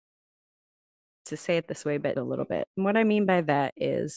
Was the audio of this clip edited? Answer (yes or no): yes